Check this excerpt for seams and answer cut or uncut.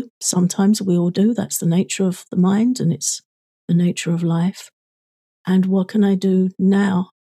uncut